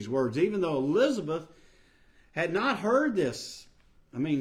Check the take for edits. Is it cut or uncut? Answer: uncut